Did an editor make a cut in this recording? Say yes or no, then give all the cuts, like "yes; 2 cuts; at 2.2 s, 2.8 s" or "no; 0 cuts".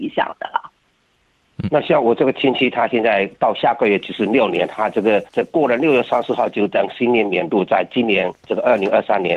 yes; 2 cuts; at 5.3 s, 8.4 s